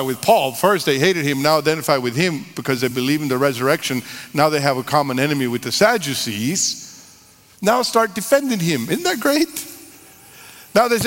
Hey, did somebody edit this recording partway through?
no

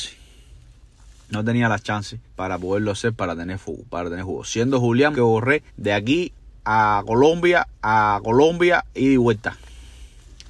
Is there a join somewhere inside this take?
yes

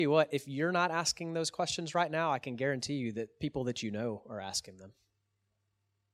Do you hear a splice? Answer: no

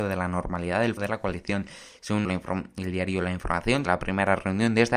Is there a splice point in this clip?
yes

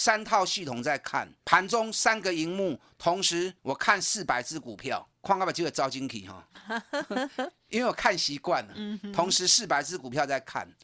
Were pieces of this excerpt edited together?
yes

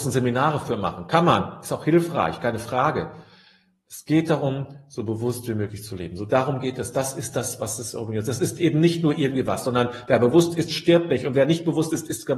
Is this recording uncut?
yes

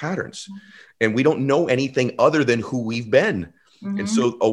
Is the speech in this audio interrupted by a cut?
no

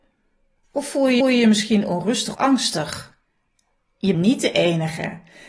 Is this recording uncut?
no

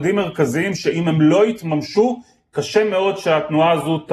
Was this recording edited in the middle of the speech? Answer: no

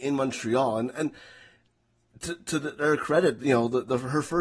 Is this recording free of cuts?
yes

